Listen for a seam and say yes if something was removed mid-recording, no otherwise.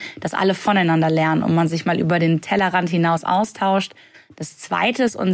no